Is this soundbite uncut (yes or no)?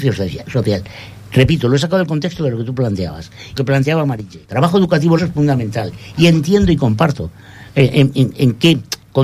no